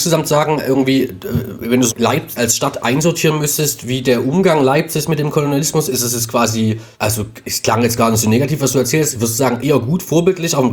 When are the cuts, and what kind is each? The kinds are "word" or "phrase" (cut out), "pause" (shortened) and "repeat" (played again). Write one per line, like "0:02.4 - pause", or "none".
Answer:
0:01.9 - word
0:02.4 - word
0:05.9 - word
0:06.9 - pause
0:09.6 - word